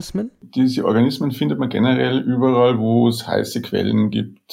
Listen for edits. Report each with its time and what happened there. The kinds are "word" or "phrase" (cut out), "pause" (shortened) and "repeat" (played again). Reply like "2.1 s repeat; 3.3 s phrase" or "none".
none